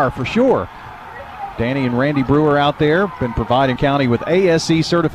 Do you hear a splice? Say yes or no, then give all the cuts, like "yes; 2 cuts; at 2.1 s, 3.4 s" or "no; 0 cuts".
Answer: yes; 1 cut; at 3.8 s